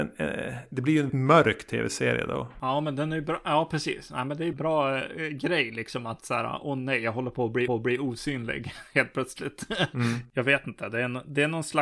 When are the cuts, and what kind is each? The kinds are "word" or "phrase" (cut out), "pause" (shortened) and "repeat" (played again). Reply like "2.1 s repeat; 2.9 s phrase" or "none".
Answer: 1.1 s word; 4.5 s word; 7.7 s repeat

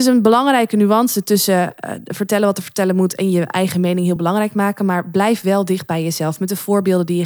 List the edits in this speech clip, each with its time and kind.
none

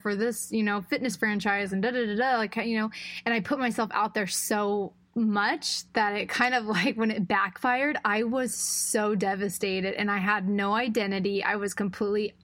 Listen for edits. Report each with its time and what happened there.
5.0 s pause

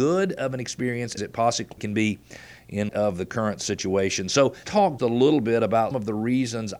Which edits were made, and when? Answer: 1.2 s word; 1.8 s word; 2.9 s word; 4.6 s word; 5.0 s word; 5.9 s word

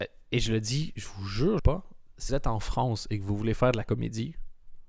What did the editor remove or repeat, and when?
1.6 s word; 2.3 s word

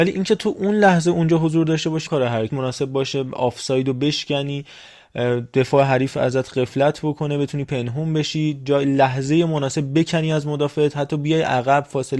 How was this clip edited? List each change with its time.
2.1 s word; 2.5 s phrase

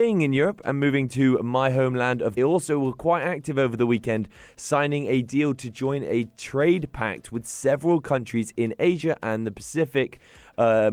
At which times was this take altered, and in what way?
2.4 s phrase

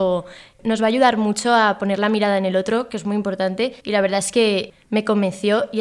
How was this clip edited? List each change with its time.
3.8 s pause

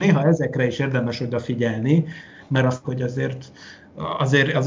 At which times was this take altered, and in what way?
2.8 s word

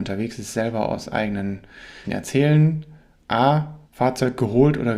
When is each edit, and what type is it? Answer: 2.0 s word; 3.8 s pause

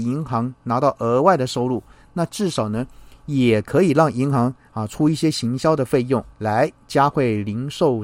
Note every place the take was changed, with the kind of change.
6.3 s pause

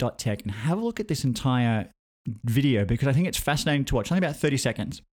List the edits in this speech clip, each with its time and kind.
none

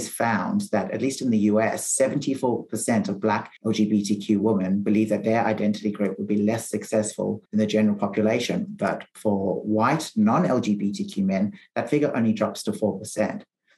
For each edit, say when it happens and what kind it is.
3.6 s pause; 7.5 s pause

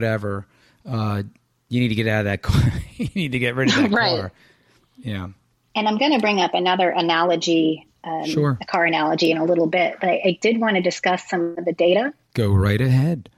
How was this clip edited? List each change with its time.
none

